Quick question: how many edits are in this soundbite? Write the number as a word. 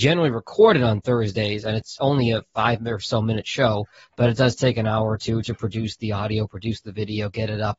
zero